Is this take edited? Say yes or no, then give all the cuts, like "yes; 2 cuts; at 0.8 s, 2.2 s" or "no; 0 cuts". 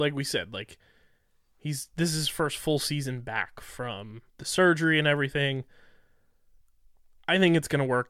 yes; 1 cut; at 4.3 s